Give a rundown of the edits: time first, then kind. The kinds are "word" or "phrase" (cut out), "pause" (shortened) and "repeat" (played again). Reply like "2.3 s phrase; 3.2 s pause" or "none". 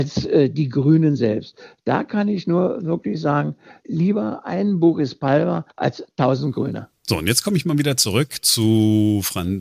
5.7 s pause; 7.0 s pause